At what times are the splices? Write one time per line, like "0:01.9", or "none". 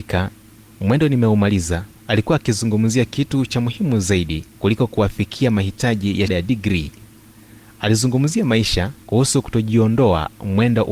0:02.0
0:04.5
0:06.3
0:09.0